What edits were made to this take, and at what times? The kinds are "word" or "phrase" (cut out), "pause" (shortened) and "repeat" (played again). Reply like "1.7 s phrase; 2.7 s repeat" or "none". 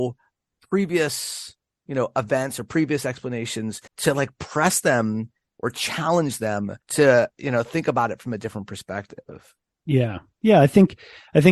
3.9 s pause; 6.8 s pause